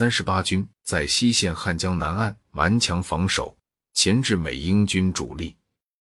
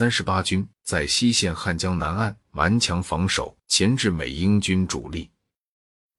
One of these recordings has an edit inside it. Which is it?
second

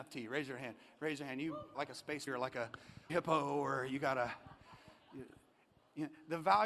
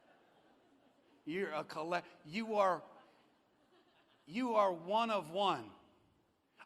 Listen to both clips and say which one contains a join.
first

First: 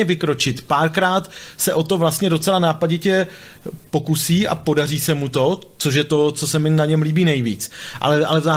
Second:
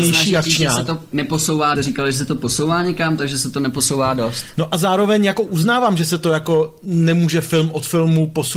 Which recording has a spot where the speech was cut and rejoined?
second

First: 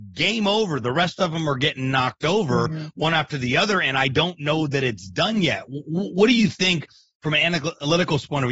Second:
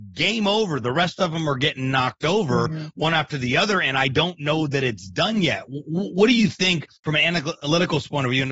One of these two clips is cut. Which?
second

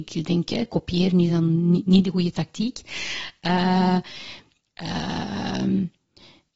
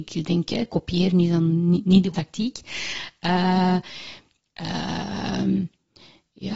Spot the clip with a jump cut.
second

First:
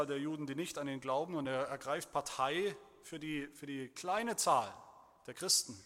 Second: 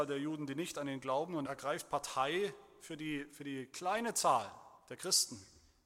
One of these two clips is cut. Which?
second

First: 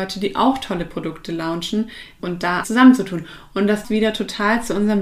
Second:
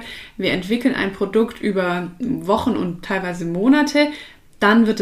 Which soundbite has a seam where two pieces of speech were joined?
first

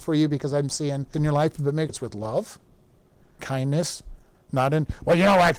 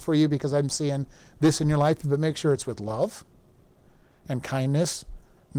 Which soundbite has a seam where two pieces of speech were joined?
first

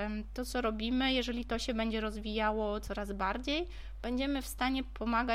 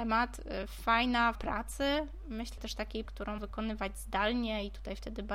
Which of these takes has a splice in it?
second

